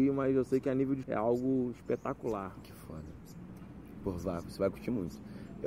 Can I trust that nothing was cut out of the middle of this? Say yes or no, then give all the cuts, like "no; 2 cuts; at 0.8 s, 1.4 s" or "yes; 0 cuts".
no; 1 cut; at 1.0 s